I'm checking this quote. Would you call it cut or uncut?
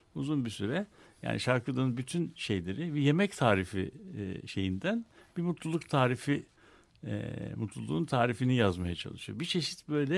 uncut